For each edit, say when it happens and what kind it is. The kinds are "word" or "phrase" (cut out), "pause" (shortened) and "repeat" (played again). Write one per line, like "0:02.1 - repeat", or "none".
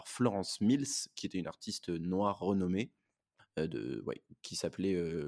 0:03.4 - pause